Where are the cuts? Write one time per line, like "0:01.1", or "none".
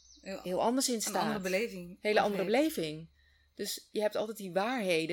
none